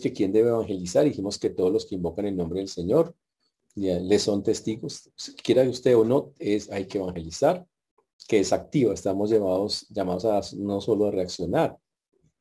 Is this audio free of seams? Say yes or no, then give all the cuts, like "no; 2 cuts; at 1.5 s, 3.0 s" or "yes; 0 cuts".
yes; 0 cuts